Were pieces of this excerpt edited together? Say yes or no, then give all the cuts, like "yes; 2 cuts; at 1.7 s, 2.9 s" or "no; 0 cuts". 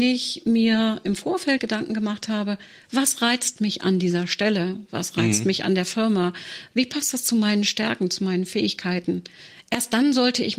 yes; 1 cut; at 1.6 s